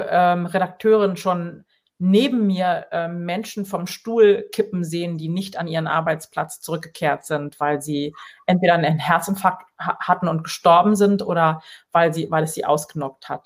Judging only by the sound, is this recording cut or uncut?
uncut